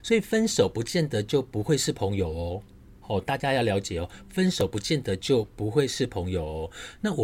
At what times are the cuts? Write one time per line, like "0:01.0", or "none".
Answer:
0:03.0